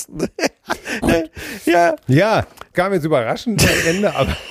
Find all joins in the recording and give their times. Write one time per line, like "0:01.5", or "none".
0:01.0
0:02.7